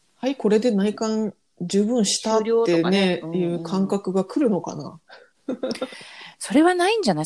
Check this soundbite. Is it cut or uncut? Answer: uncut